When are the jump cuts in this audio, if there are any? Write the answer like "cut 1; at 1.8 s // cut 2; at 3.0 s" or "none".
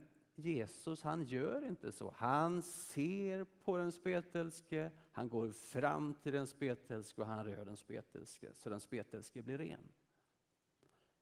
none